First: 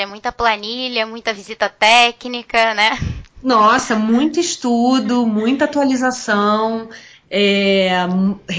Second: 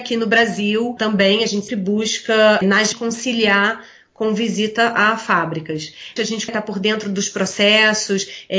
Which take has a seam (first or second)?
second